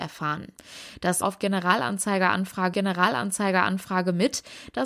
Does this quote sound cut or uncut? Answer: cut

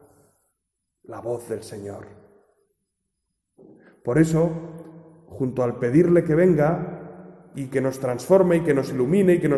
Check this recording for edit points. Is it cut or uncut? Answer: uncut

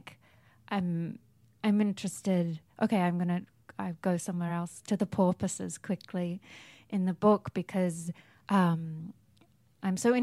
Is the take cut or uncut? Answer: uncut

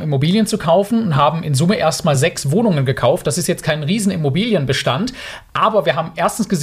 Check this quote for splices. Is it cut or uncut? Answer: uncut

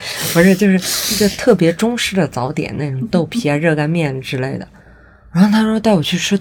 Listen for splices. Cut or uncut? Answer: uncut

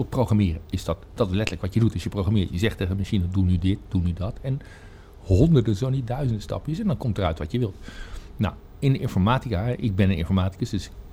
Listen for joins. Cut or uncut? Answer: uncut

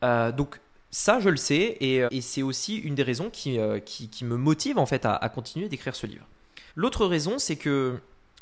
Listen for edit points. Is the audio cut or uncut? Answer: cut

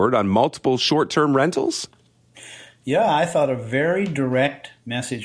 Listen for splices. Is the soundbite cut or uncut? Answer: uncut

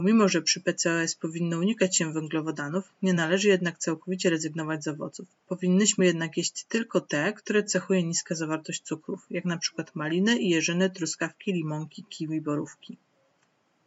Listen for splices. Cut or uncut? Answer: uncut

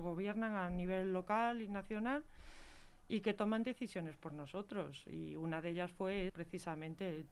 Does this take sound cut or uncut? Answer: cut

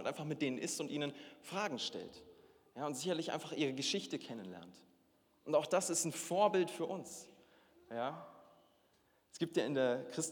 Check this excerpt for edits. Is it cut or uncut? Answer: uncut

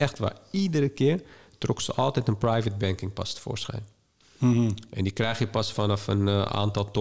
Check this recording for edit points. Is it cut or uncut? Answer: uncut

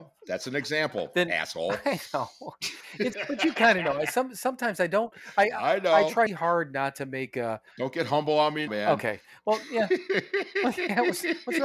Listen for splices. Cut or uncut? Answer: cut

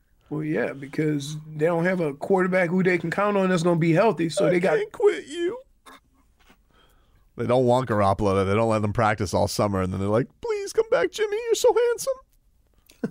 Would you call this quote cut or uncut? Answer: uncut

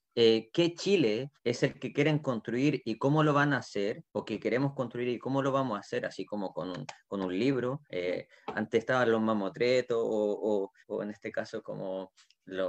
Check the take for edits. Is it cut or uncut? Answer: cut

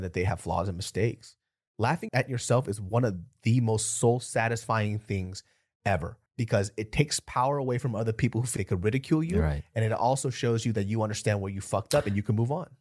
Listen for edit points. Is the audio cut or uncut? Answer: cut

